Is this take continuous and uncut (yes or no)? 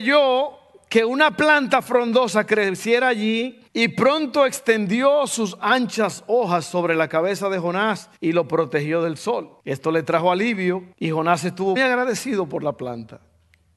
no